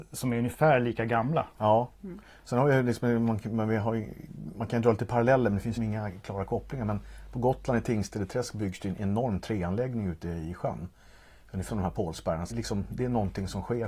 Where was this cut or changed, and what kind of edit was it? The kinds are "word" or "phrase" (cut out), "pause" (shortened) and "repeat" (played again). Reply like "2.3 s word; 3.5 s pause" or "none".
5.8 s word; 11.7 s word; 12.5 s word